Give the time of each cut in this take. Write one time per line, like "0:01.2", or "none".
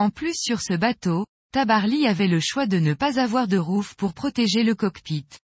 none